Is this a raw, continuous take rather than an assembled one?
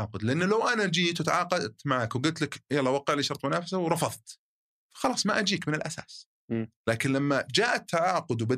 no; 2 cuts; at 4.7 s, 6.8 s

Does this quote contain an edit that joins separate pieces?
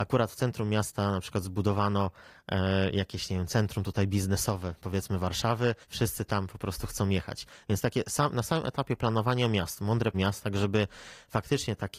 yes; 2 cuts; at 5.8 s, 10.1 s

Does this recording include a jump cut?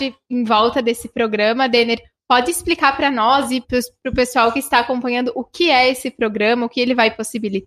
yes; 1 cut; at 3.6 s

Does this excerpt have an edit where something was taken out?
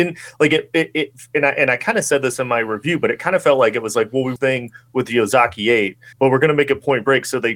yes; 2 cuts; at 4.4 s, 6.1 s

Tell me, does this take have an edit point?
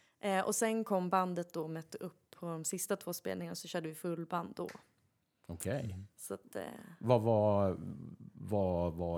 no; 0 cuts

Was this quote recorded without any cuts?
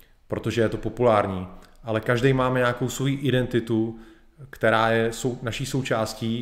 yes; 0 cuts

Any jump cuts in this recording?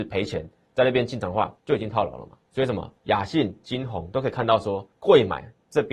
yes; 4 cuts; at 1.6 s, 2.5 s, 3.0 s, 4.9 s

